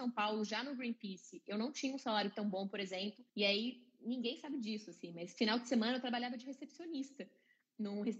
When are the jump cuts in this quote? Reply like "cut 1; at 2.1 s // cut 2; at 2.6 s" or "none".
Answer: cut 1; at 3.3 s